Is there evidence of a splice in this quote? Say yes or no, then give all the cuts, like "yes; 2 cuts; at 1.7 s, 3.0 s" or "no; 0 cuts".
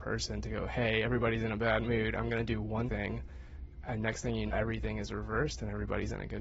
yes; 2 cuts; at 2.9 s, 4.5 s